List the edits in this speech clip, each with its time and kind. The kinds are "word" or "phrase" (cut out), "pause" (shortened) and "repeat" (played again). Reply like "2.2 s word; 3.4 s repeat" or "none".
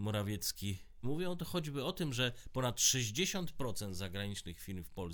1.0 s word